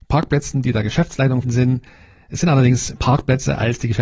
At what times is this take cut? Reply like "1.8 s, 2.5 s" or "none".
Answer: 1.4 s, 3.0 s